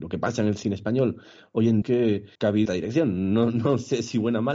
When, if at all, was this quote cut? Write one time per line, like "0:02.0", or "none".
0:01.8
0:02.3
0:02.7